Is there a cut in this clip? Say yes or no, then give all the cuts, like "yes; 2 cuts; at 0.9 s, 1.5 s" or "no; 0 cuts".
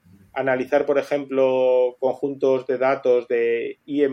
no; 0 cuts